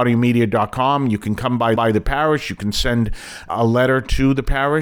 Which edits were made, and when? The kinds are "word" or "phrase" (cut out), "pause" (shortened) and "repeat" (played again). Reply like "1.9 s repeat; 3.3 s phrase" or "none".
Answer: 1.8 s repeat; 3.5 s word